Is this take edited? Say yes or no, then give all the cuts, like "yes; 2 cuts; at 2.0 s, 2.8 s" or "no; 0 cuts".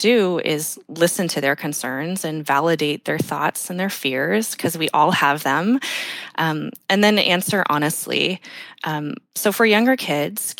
no; 0 cuts